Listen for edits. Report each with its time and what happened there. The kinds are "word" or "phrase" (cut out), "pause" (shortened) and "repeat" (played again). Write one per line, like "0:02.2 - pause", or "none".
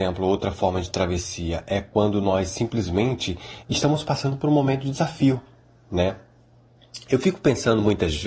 0:03.6 - word